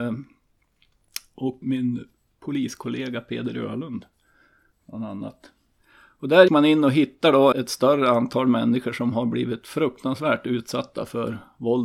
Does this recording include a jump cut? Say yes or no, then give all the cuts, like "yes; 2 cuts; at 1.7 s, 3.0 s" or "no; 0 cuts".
yes; 3 cuts; at 1.6 s, 6.5 s, 7.5 s